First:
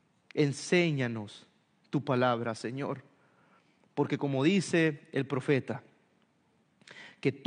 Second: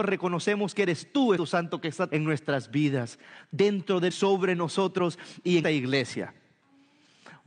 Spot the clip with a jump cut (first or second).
second